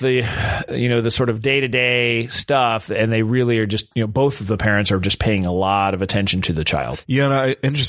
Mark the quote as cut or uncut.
uncut